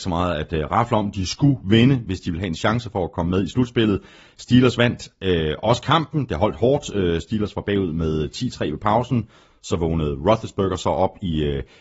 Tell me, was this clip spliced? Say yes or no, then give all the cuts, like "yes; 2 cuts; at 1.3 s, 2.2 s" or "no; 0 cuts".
no; 0 cuts